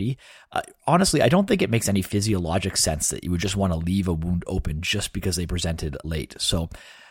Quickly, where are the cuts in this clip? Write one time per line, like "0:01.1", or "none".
none